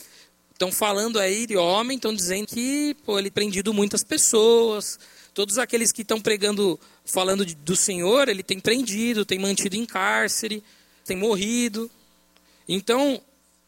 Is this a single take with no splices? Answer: no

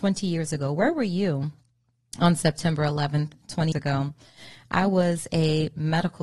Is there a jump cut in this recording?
yes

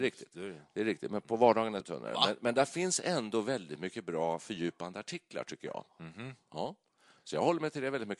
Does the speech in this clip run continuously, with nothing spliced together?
no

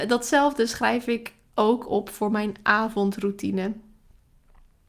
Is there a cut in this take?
no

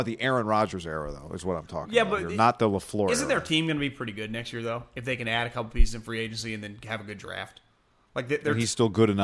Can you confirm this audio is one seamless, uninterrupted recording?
yes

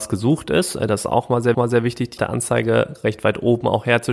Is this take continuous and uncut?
no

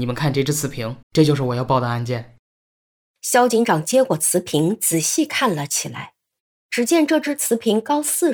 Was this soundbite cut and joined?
yes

